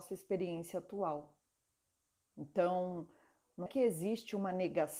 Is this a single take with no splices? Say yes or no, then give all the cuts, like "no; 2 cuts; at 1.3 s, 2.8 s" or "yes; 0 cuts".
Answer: no; 1 cut; at 3.7 s